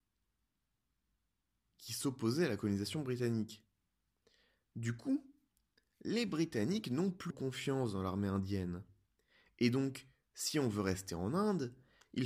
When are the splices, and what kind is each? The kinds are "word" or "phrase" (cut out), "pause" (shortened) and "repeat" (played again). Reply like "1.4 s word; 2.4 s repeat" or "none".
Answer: 7.3 s word